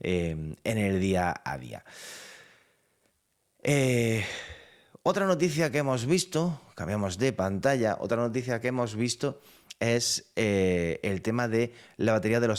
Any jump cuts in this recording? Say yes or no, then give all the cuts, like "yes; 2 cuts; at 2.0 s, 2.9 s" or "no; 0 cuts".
no; 0 cuts